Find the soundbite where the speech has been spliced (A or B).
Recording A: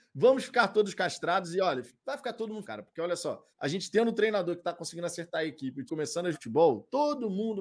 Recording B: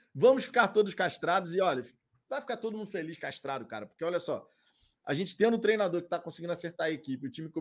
A